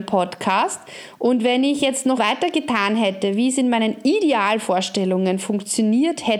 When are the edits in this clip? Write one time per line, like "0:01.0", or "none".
0:02.2

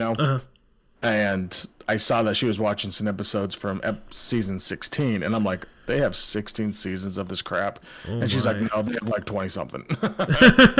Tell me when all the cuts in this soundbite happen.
none

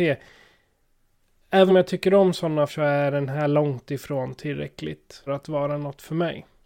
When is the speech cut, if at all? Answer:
0:01.7
0:02.7
0:05.3

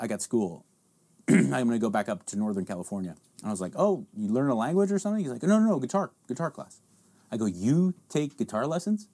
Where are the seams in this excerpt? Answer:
none

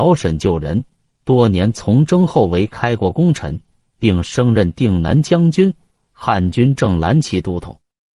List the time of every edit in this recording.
none

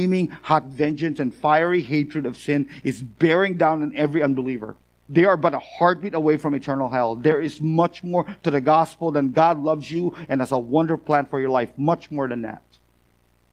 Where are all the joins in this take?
0:04.8

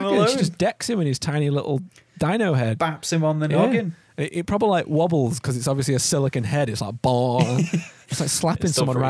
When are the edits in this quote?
none

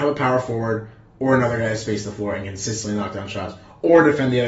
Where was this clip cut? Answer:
none

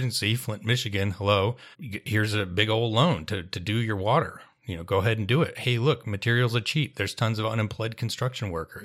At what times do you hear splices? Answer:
0:01.7

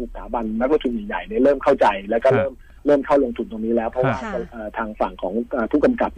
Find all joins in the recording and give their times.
none

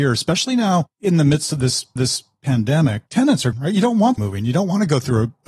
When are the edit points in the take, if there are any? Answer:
0:02.0
0:03.5
0:04.2

